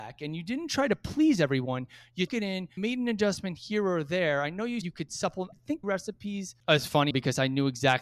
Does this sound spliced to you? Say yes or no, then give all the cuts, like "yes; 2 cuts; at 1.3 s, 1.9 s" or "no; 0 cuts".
yes; 6 cuts; at 2.3 s, 2.8 s, 4.8 s, 5.5 s, 5.8 s, 7.1 s